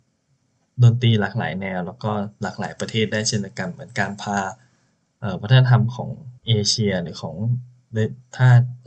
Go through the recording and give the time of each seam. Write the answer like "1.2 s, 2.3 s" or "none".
6.4 s

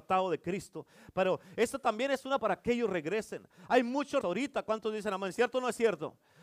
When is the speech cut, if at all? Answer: 2.4 s, 4.2 s

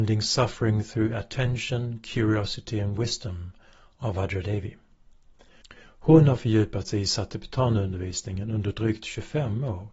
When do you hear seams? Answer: none

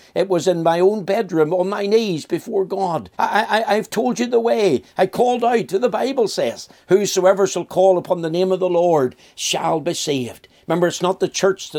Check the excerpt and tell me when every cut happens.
3.1 s

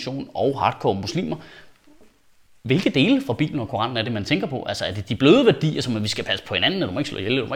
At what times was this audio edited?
none

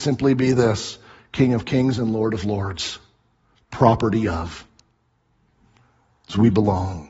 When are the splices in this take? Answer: none

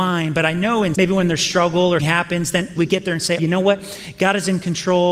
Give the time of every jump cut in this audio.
0.9 s, 2.0 s, 2.8 s, 3.4 s

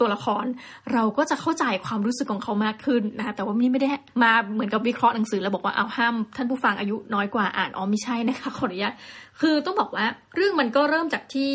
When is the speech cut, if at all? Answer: none

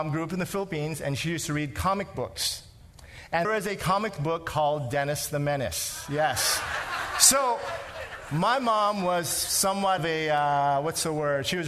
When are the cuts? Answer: 3.4 s, 10.0 s

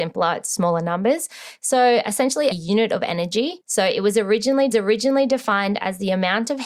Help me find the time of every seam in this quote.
2.5 s, 4.7 s

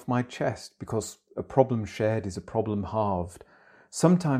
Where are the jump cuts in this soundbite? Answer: none

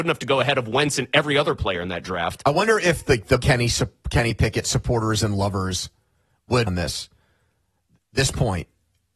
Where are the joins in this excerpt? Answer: 3.4 s

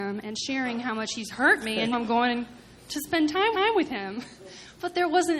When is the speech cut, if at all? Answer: 1.9 s, 3.5 s

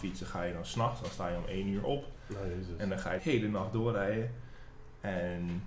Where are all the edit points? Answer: 3.2 s

